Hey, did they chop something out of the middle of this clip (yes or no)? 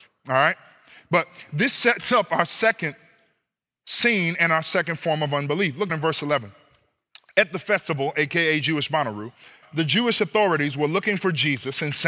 yes